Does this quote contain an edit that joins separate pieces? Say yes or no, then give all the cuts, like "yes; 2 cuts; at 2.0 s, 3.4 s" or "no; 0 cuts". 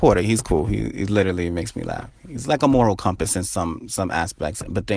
no; 0 cuts